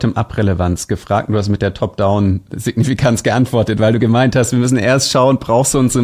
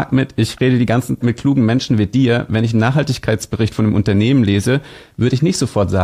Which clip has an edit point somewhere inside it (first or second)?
second